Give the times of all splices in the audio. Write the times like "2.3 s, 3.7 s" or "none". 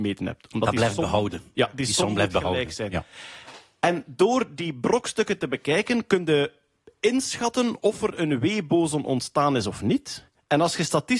none